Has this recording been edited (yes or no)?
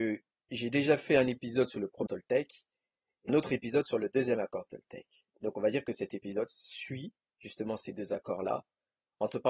yes